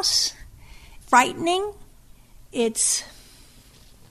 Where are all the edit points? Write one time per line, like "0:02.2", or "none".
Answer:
0:01.0